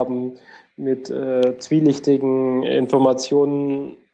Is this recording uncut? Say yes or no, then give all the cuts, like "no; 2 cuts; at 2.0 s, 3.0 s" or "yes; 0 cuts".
yes; 0 cuts